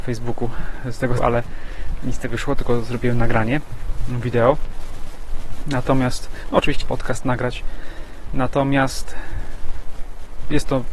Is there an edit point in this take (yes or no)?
yes